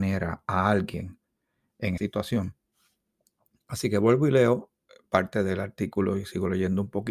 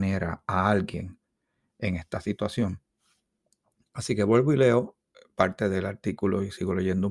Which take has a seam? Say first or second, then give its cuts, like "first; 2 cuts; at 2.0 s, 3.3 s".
first; 1 cut; at 2.0 s